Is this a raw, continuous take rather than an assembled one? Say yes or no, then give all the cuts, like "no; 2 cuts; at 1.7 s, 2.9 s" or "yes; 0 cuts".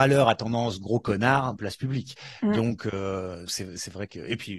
no; 2 cuts; at 1.6 s, 3.5 s